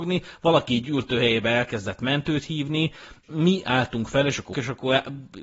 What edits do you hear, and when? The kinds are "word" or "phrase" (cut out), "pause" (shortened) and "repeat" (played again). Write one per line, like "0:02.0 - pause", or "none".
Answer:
0:03.2 - word
0:04.5 - word